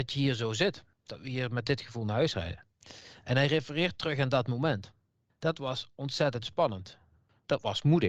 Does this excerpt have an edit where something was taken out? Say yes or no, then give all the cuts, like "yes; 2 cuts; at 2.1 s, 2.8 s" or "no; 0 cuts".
yes; 1 cut; at 0.9 s